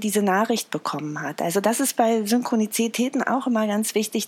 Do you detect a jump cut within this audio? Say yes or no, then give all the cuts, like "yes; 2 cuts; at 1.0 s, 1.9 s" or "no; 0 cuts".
no; 0 cuts